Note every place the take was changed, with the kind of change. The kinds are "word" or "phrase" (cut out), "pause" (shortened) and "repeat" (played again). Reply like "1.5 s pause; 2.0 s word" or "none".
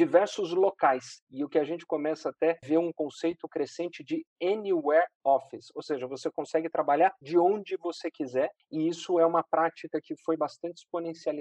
none